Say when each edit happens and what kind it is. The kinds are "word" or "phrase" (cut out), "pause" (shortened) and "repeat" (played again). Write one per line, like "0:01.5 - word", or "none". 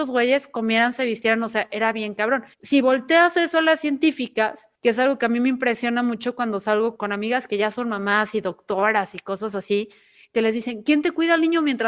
0:02.5 - pause
0:04.8 - pause
0:07.0 - word